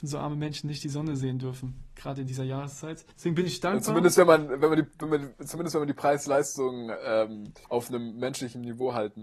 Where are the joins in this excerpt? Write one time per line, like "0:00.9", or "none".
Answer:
0:03.1
0:07.6